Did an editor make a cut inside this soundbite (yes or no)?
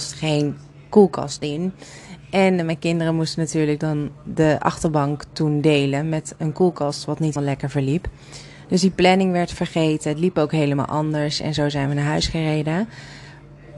yes